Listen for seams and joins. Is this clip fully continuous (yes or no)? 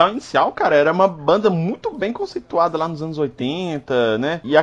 yes